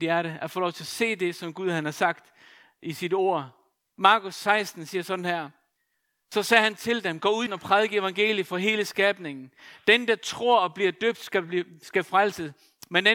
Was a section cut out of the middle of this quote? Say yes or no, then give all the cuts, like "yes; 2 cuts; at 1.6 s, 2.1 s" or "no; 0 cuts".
yes; 1 cut; at 7.5 s